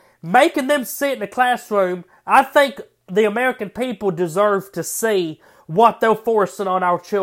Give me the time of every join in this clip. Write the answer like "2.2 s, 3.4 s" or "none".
none